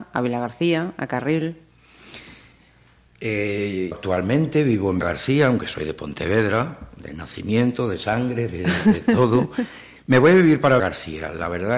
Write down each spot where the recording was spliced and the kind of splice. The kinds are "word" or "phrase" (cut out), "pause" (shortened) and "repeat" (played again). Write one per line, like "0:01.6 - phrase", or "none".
0:03.9 - word
0:05.0 - word
0:10.8 - word

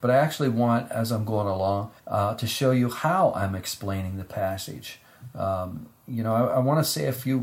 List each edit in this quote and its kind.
0:02.0 - pause

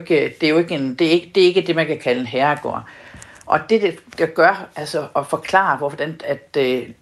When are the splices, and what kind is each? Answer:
none

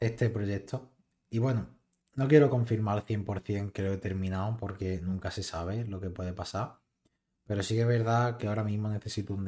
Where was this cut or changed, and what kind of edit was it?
0:03.7 - word

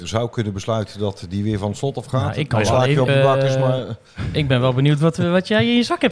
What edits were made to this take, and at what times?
0:03.1 - word

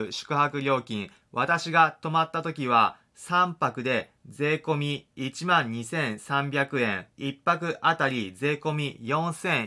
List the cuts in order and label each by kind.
0:04.2 - pause
0:07.1 - pause

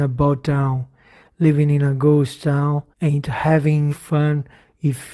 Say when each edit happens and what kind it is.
0:02.9 - pause
0:03.9 - word

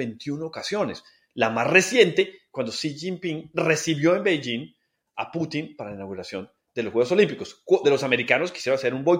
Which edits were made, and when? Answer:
0:07.8 - word

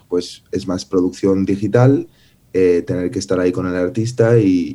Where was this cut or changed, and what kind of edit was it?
none

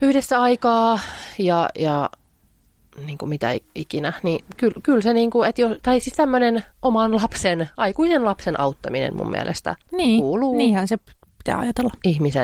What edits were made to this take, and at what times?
0:06.7 - pause
0:09.8 - pause

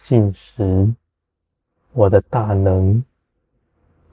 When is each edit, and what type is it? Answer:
none

